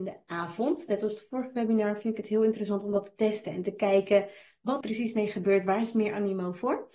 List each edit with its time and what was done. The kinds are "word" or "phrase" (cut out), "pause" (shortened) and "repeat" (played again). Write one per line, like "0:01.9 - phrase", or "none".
0:04.8 - word